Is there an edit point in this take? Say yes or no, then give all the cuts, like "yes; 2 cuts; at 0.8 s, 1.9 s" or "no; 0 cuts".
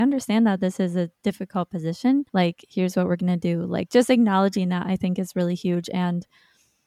yes; 1 cut; at 2.3 s